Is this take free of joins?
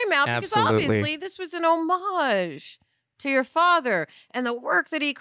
yes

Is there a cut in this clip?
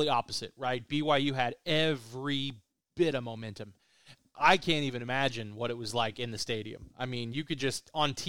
no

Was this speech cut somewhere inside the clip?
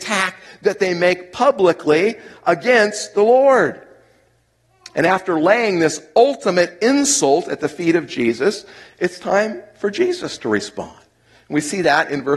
no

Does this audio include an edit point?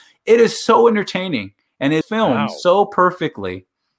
yes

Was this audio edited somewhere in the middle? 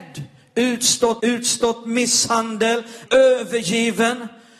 yes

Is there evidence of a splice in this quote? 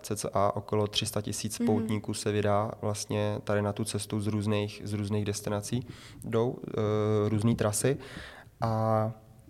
no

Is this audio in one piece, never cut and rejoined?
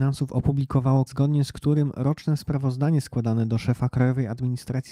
no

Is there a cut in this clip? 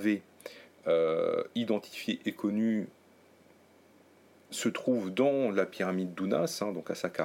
no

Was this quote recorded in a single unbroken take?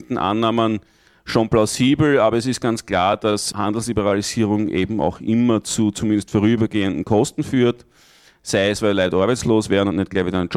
yes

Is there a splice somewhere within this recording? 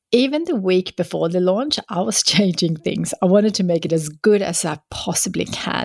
no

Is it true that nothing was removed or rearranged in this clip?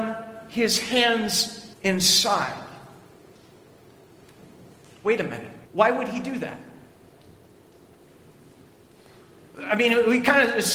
no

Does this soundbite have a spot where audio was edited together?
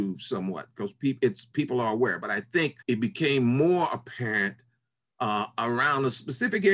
yes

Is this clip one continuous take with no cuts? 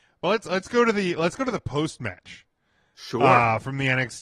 yes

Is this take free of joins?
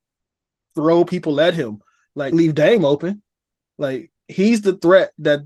no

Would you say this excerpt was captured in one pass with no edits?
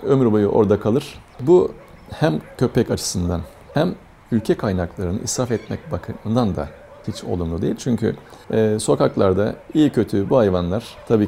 yes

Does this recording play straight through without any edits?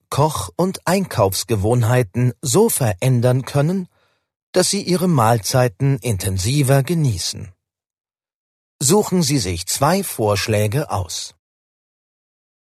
yes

